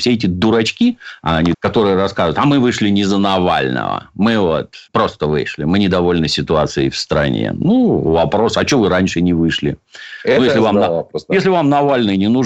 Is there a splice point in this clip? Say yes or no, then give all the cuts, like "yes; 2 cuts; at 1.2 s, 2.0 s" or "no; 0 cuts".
yes; 2 cuts; at 1.5 s, 4.9 s